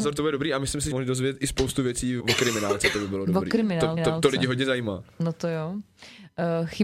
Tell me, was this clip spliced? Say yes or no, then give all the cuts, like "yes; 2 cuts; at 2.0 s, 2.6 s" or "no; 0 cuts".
yes; 3 cuts; at 0.9 s, 2.2 s, 4.0 s